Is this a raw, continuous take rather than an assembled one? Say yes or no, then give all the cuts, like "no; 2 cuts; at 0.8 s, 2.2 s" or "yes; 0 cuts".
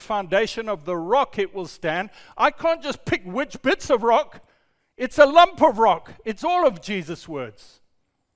yes; 0 cuts